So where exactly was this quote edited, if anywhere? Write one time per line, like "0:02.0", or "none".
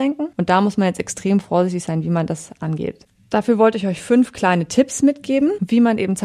none